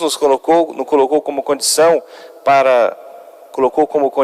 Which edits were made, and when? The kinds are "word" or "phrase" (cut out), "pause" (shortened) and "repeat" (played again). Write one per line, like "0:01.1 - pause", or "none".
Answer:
none